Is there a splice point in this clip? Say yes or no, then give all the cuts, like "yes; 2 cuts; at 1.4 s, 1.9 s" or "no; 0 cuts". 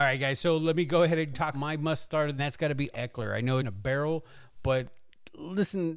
yes; 4 cuts; at 1.5 s, 2.4 s, 2.9 s, 3.6 s